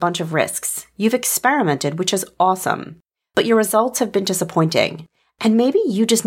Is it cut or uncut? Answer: uncut